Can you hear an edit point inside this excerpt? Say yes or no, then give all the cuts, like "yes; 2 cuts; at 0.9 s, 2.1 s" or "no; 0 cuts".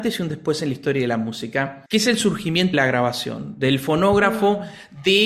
yes; 2 cuts; at 1.9 s, 2.7 s